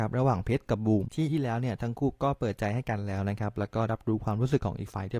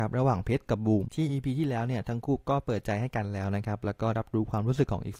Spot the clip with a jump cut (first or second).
first